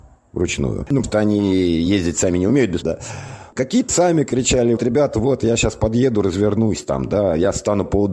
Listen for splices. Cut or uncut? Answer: cut